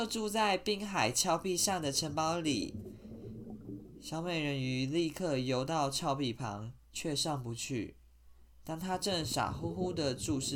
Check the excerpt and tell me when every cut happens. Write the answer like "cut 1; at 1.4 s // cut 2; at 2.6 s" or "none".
cut 1; at 6.8 s